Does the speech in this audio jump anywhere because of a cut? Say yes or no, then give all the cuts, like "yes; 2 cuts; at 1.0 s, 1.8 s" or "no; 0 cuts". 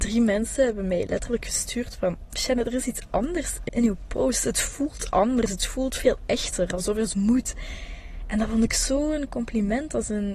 yes; 2 cuts; at 3.7 s, 7.1 s